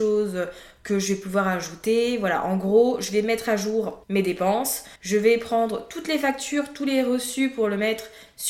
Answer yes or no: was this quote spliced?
yes